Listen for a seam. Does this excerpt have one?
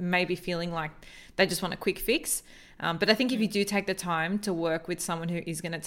no; 0 cuts

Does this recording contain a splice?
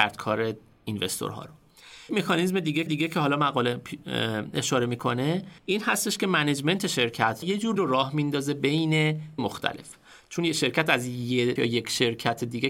yes; 7 cuts; at 2.1 s, 2.9 s, 5.6 s, 7.4 s, 7.8 s, 9.4 s, 11.6 s

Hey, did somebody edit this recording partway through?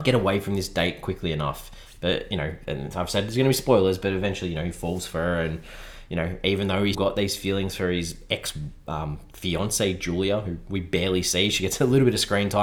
yes; 1 cut; at 6.9 s

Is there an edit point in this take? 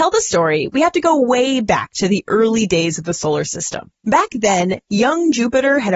yes; 1 cut; at 4.0 s

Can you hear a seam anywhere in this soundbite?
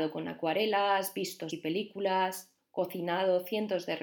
yes; 1 cut; at 1.5 s

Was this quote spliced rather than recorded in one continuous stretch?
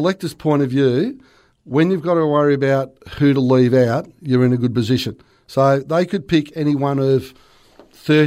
no; 0 cuts

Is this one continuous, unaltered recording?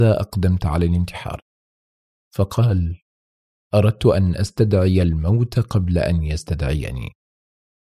yes; 0 cuts

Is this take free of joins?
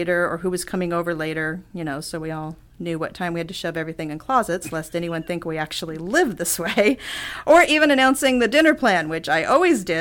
yes; 0 cuts

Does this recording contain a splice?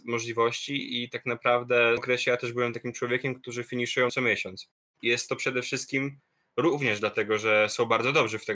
yes; 2 cuts; at 2.0 s, 4.1 s

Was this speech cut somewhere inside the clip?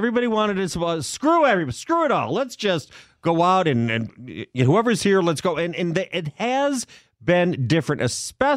no; 0 cuts

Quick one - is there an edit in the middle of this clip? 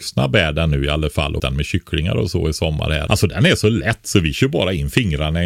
yes; 2 cuts; at 1.4 s, 3.1 s

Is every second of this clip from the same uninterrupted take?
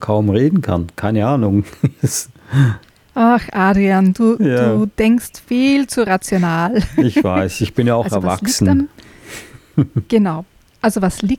yes; 0 cuts

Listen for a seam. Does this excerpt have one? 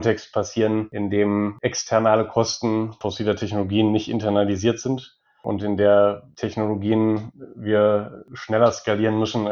no; 0 cuts

